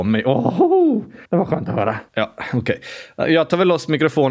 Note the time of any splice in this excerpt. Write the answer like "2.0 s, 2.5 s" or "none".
1.2 s, 2.1 s